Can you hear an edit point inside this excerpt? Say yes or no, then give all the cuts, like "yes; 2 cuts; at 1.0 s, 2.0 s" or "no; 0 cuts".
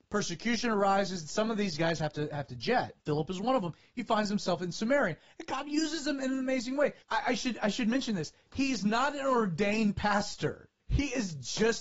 yes; 3 cuts; at 3.0 s, 7.0 s, 10.8 s